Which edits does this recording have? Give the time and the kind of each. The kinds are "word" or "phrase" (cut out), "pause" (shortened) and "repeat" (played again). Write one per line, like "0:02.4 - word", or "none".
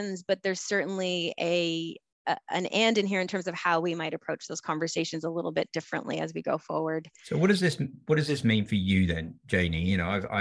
none